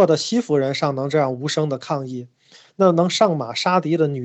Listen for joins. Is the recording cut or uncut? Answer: uncut